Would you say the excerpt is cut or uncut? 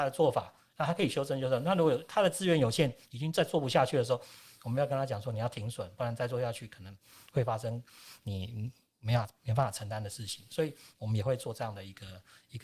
uncut